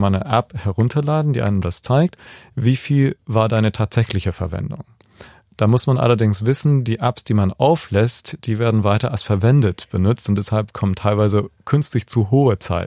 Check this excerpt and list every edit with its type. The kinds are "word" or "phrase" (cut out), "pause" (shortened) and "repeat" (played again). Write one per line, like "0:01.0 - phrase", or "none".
none